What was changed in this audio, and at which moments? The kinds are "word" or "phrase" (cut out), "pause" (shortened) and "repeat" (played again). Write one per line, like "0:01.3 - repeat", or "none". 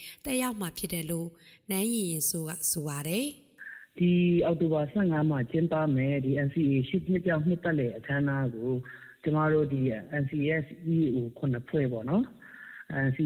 none